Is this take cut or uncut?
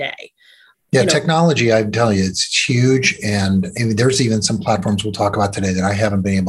uncut